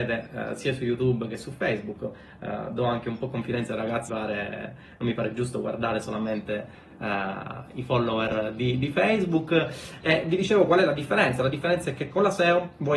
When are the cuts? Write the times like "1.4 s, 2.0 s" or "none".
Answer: 4.1 s